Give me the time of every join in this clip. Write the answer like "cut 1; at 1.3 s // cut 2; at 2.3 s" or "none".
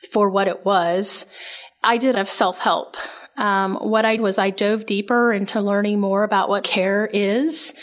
cut 1; at 2.1 s // cut 2; at 4.2 s // cut 3; at 6.6 s